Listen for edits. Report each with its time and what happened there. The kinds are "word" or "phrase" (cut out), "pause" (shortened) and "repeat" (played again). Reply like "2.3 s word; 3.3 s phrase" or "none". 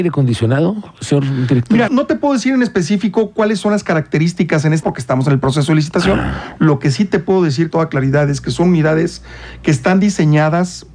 1.9 s word; 4.8 s word; 7.7 s word